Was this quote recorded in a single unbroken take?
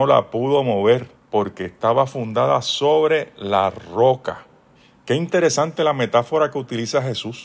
no; 2 cuts; at 1.1 s, 4.7 s

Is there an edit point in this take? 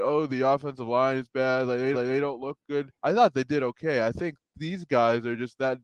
yes; 2 cuts; at 1.9 s, 3.0 s

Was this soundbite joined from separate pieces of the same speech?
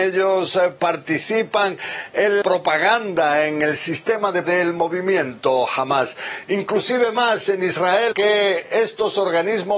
yes; 3 cuts; at 2.4 s, 4.4 s, 8.1 s

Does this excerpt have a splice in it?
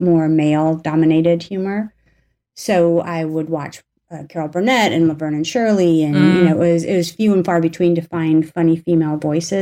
no; 0 cuts

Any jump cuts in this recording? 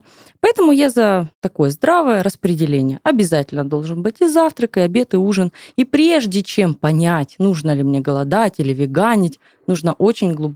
yes; 1 cut; at 1.3 s

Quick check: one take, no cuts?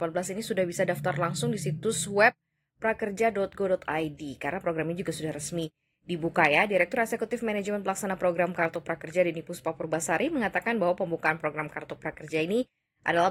yes; 0 cuts

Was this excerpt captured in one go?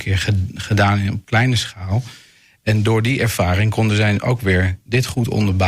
yes; 0 cuts

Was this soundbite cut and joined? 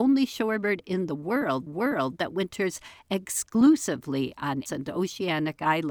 yes; 2 cuts; at 1.7 s, 4.7 s

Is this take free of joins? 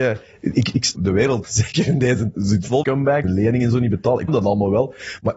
no; 6 cuts; at 0.9 s, 1.4 s, 2.3 s, 2.8 s, 3.2 s, 4.3 s

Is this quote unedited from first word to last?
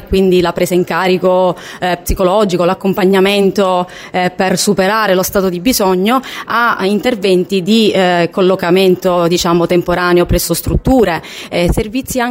yes; 0 cuts

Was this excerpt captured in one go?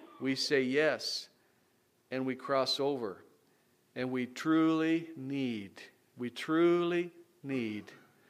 yes; 0 cuts

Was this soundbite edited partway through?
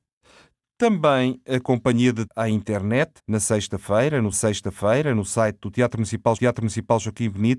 yes; 4 cuts; at 2.3 s, 3.2 s, 4.3 s, 6.4 s

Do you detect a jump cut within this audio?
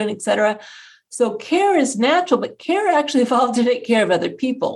no; 0 cuts

